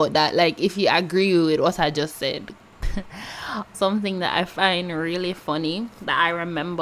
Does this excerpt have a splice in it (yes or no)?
yes